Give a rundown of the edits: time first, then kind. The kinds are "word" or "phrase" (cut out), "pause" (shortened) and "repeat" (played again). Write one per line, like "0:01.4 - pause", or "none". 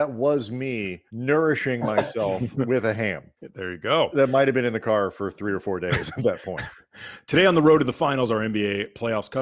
0:01.1 - pause
0:03.4 - pause